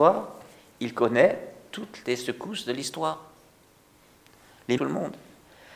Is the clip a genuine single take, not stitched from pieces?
no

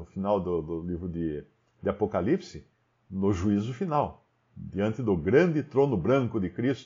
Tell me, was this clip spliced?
no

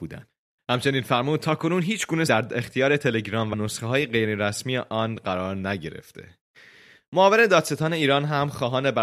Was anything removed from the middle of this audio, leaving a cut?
yes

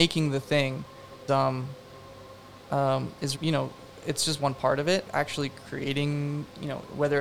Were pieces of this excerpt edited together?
yes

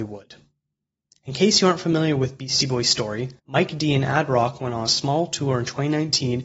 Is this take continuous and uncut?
no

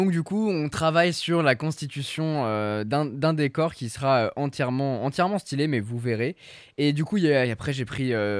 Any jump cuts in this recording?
no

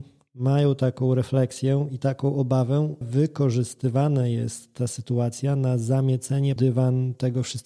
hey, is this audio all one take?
no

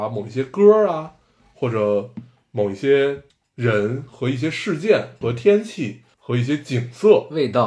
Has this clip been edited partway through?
yes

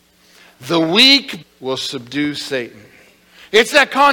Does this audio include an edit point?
yes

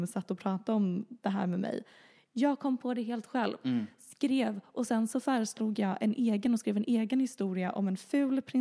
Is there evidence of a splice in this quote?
no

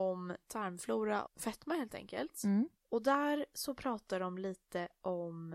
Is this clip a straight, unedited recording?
no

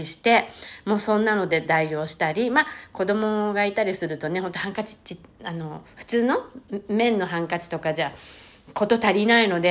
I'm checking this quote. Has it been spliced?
no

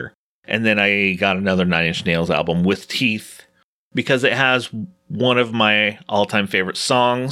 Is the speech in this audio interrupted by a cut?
no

